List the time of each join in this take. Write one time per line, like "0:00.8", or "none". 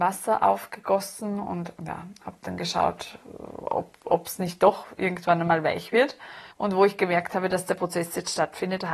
0:01.8
0:06.5